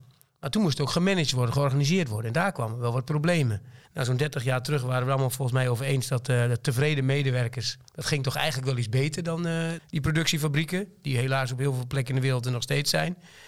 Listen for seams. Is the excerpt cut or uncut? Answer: cut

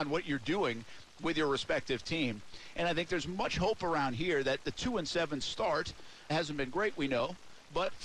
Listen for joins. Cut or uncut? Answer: cut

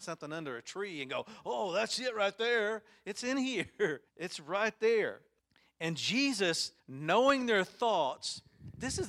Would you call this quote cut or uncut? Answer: cut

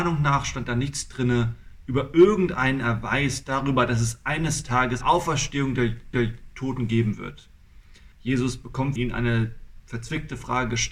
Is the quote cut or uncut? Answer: cut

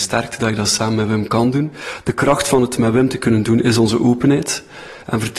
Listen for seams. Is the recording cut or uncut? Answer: uncut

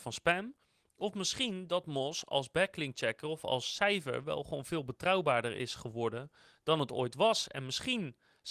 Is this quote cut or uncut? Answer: uncut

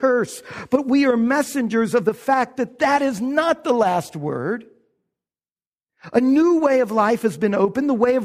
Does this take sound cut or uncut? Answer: uncut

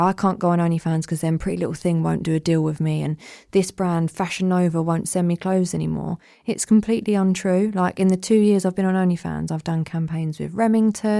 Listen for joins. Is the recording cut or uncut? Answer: uncut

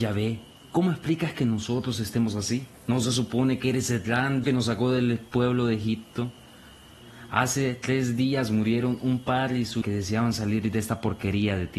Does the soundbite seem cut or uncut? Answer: cut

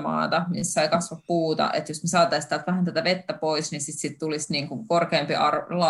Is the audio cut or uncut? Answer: uncut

